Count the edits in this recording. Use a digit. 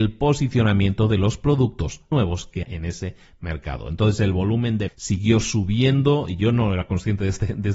3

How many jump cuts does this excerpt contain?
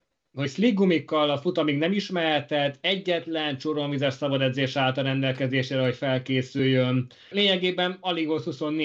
1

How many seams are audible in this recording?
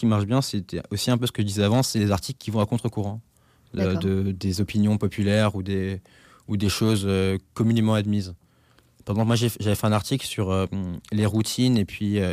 0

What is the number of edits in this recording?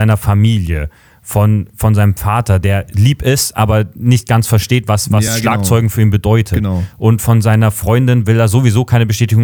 0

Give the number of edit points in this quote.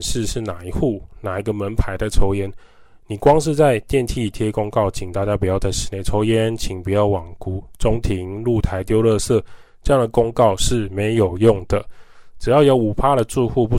0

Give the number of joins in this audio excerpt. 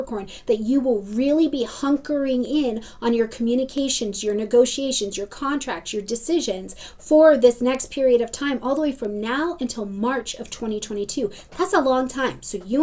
0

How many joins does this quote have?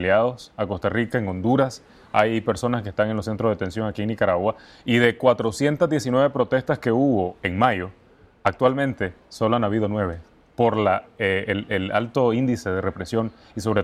0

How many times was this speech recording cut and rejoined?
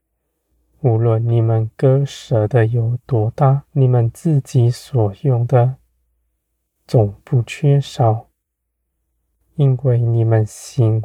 1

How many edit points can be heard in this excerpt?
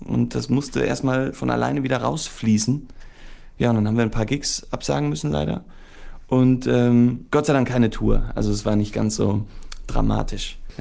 0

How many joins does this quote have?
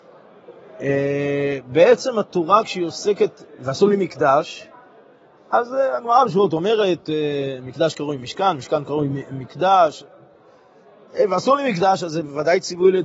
0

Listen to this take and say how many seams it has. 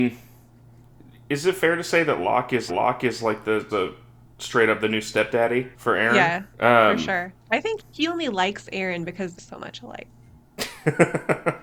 6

